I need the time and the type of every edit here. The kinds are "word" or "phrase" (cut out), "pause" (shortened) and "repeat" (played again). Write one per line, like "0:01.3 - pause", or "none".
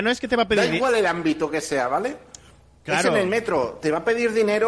none